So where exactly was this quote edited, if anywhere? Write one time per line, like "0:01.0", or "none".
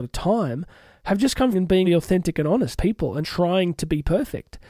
0:01.5
0:01.8
0:02.8
0:03.2